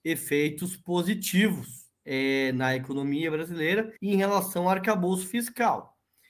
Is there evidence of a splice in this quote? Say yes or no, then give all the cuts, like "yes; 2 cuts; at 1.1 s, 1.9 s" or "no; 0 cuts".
yes; 2 cuts; at 2.0 s, 4.0 s